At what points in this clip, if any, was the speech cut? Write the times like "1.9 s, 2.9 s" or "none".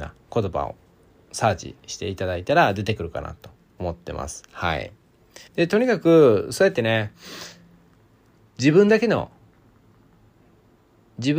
1.8 s, 5.5 s

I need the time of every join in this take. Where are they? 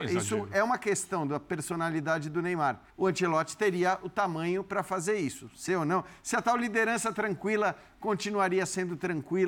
2.9 s, 5.7 s

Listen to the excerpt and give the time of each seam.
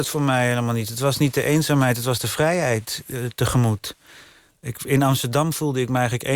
none

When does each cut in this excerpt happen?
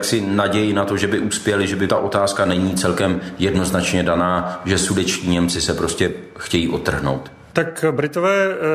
1.9 s

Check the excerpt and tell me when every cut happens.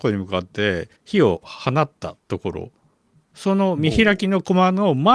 1.0 s

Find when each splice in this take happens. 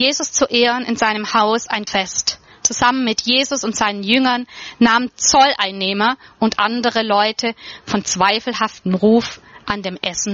1.9 s, 5.1 s

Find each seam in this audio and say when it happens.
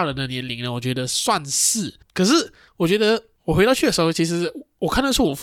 2.0 s

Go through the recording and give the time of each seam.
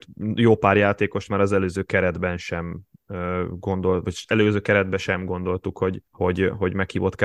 6.1 s

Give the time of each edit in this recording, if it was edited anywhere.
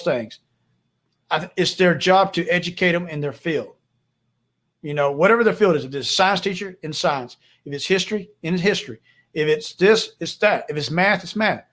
none

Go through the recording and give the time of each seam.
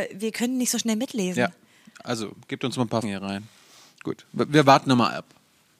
3.0 s, 4.5 s

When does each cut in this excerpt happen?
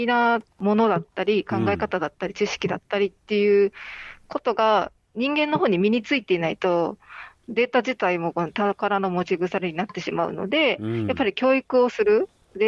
none

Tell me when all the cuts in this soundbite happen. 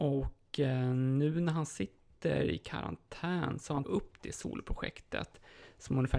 3.8 s

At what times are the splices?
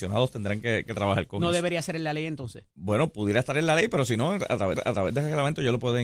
2.7 s, 4.8 s

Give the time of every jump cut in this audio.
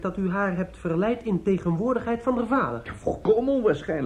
none

